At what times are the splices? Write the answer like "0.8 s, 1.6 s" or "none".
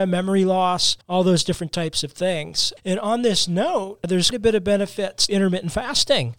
1.0 s, 4.3 s, 5.3 s